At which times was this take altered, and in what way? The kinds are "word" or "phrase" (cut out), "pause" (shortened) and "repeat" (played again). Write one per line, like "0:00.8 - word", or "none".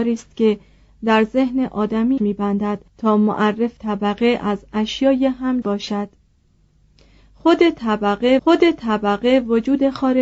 0:02.2 - word
0:02.9 - pause
0:03.8 - word
0:05.6 - word
0:08.4 - repeat